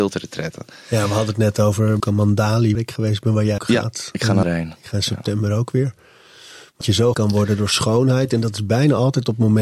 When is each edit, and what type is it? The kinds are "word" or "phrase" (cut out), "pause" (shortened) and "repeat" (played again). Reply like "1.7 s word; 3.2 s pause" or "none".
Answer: 2.0 s word; 2.7 s word; 3.6 s word; 4.4 s word; 6.8 s word; 7.1 s word

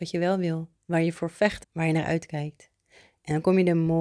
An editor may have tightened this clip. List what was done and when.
1.6 s word

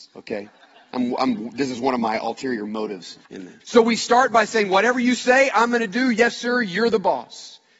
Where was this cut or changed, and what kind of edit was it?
3.2 s pause; 3.6 s pause

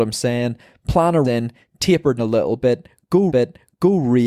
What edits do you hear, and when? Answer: 1.2 s word; 2.2 s word; 3.3 s repeat

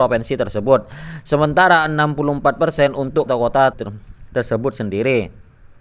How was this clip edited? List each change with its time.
3.3 s word; 3.7 s word

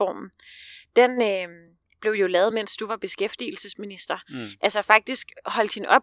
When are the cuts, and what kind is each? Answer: none

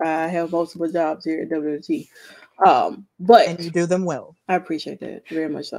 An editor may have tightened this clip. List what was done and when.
4.4 s pause

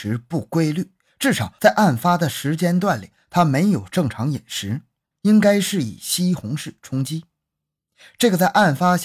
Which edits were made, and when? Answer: 5.0 s pause

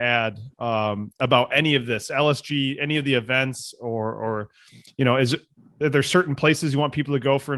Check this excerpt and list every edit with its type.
none

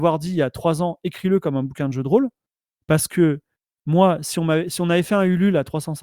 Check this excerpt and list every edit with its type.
none

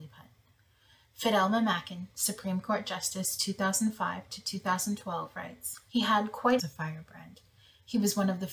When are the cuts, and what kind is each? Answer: 5.9 s pause; 6.6 s phrase

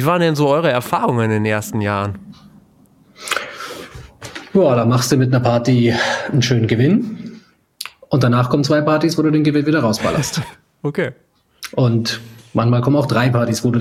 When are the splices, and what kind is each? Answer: none

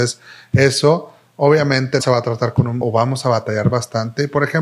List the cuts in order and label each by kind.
2.0 s word; 2.8 s word

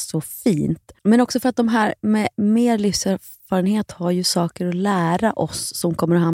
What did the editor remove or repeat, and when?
1.0 s pause

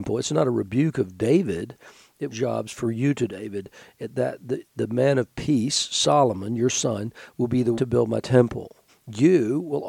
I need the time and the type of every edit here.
2.3 s phrase; 3.3 s word; 7.8 s word; 8.9 s pause

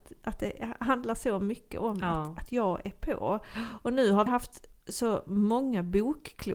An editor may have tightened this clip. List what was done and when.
4.3 s word

